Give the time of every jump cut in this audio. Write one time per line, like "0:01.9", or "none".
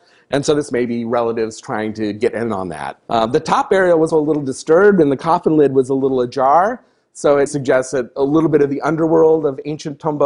0:03.0
0:04.1
0:07.5